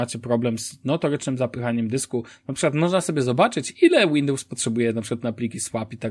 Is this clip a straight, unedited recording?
yes; 0 cuts

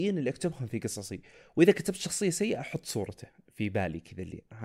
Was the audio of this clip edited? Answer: no; 0 cuts

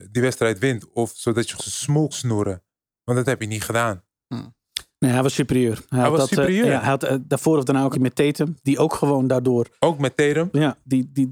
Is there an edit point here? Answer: yes; 3 cuts; at 1.6 s, 2.1 s, 7.9 s

